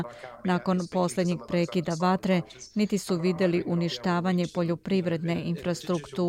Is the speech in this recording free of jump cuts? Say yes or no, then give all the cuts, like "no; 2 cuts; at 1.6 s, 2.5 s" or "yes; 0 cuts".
yes; 0 cuts